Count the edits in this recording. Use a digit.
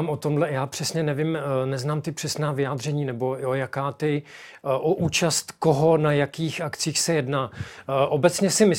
0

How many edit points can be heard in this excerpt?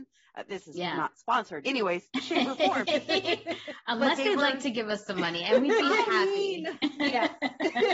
1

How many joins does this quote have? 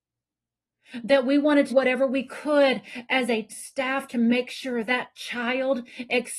3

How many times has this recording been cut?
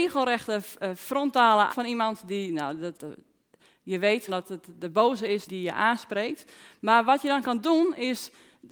4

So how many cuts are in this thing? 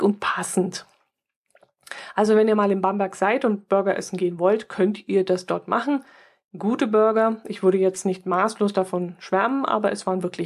0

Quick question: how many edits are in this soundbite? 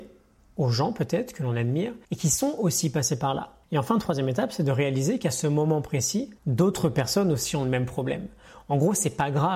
3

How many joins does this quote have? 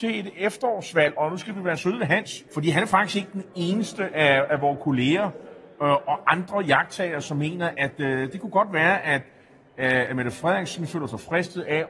2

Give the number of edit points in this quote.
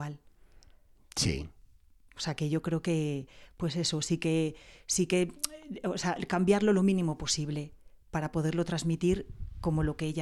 0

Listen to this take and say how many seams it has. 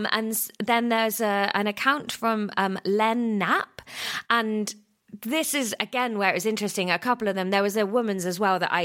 0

